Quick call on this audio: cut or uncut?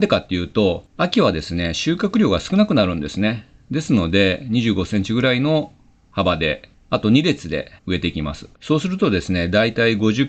cut